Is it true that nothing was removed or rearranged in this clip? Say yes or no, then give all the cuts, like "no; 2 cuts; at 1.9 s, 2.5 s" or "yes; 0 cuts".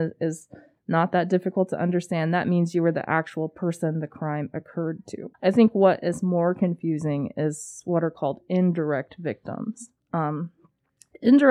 no; 1 cut; at 5.3 s